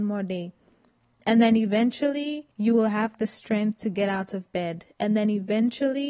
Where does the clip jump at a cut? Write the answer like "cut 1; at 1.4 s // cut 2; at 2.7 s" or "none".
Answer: cut 1; at 2.5 s